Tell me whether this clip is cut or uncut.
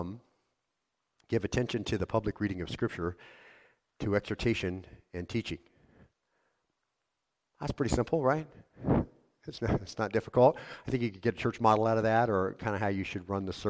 uncut